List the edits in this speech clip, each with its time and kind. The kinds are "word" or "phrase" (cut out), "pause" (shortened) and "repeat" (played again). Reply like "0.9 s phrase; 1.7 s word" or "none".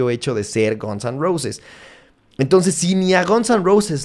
none